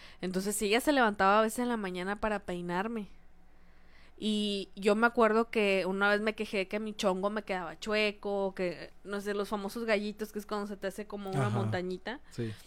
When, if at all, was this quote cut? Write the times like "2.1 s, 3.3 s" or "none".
none